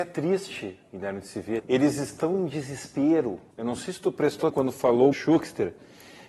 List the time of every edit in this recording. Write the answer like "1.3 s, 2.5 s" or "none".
1.6 s, 3.5 s, 4.5 s, 5.1 s